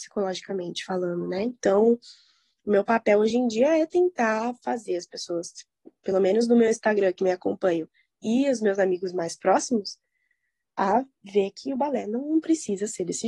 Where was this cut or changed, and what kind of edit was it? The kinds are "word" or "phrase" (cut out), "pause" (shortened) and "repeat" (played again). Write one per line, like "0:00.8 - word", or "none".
none